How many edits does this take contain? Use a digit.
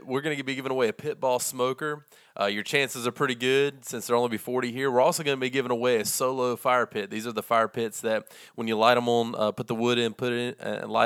0